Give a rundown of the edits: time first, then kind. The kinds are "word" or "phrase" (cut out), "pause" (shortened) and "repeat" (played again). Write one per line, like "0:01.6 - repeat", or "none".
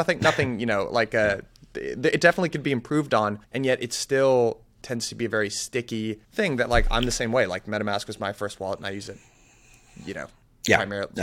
0:03.4 - pause
0:06.2 - pause